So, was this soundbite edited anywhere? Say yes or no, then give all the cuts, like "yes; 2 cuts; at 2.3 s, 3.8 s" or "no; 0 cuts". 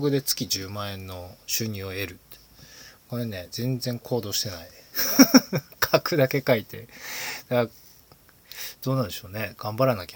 no; 0 cuts